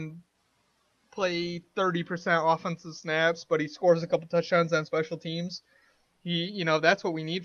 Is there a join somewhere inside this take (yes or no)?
no